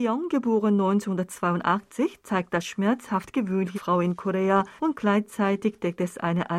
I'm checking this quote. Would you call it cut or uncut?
cut